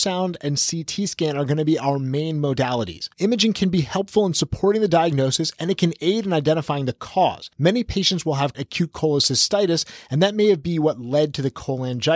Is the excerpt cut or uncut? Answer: cut